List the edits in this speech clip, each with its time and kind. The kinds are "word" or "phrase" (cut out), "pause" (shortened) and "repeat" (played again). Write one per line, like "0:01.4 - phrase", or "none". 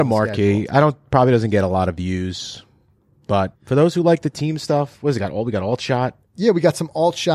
0:03.6 - pause
0:06.2 - pause

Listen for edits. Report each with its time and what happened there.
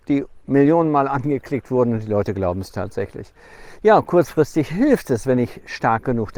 none

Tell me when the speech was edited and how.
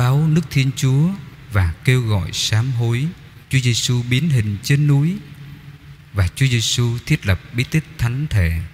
0:03.4 - pause

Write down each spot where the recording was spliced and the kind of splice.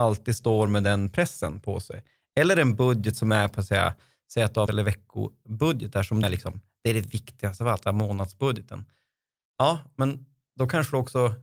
0:04.7 - word
0:06.2 - word
0:07.8 - word

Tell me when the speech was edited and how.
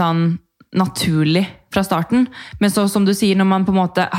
none

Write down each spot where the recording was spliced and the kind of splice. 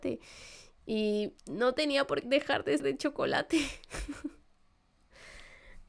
0:01.4 - pause
0:02.2 - word
0:02.8 - word

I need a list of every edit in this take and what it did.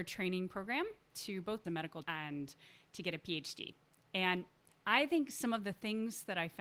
0:01.6 - phrase
0:02.0 - word

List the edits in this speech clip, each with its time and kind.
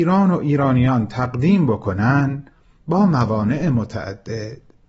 none

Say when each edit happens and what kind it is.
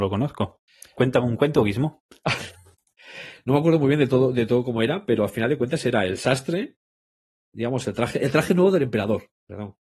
none

